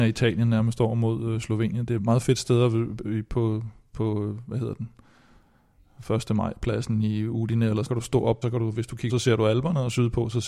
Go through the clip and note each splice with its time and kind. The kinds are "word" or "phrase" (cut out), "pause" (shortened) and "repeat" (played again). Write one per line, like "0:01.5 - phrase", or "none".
0:02.0 - word
0:07.9 - phrase
0:08.4 - phrase
0:09.1 - word

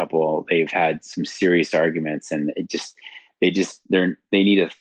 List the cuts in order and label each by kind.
none

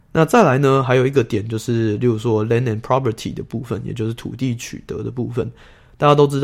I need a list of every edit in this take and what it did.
none

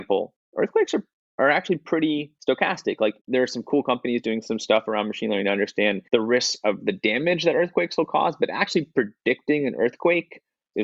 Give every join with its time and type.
0:02.4 - pause
0:06.1 - pause

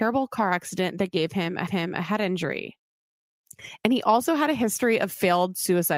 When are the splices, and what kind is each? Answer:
0:01.7 - repeat

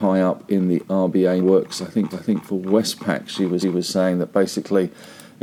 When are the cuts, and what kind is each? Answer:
0:01.4 - word
0:02.1 - repeat
0:03.6 - repeat

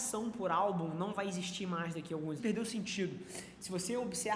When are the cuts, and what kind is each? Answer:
0:02.4 - phrase

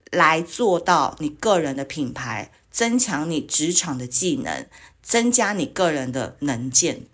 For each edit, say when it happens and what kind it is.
none

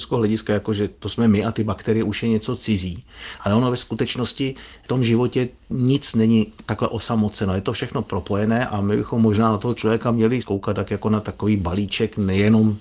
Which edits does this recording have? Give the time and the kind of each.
0:10.4 - word

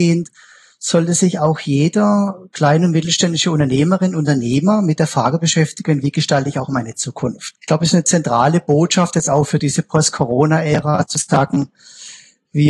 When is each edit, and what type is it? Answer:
0:07.6 - pause

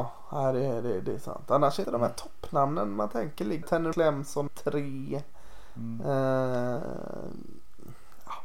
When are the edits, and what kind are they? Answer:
0:01.8 - word
0:03.6 - word
0:03.9 - word
0:04.5 - word

